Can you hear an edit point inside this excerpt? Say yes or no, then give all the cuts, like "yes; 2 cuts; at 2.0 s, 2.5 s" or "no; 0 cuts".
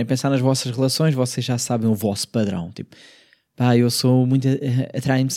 no; 0 cuts